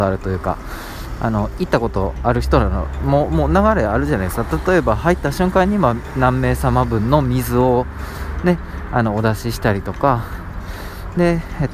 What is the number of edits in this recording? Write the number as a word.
zero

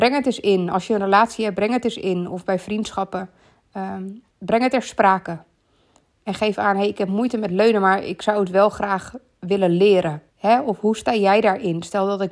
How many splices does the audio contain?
two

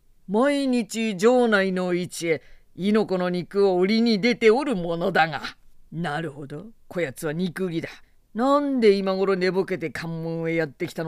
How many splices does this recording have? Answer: two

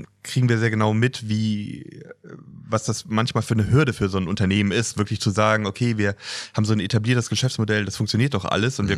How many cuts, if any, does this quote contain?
zero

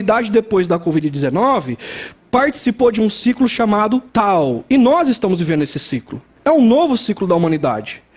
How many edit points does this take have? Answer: two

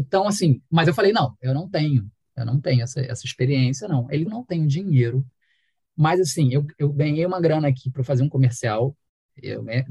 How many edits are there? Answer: one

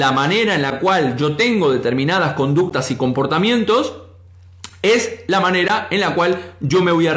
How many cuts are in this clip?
zero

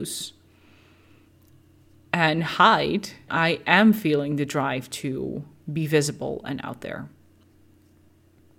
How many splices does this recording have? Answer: one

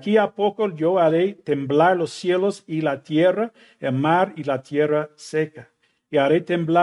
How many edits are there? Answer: zero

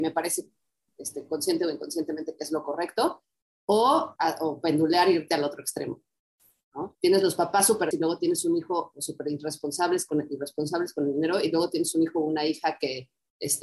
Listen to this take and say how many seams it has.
three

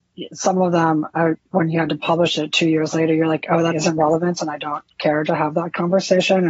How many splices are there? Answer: two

